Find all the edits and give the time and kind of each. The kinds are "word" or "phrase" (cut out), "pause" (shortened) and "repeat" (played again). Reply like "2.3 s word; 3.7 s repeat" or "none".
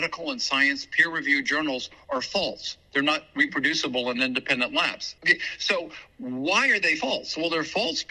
5.2 s pause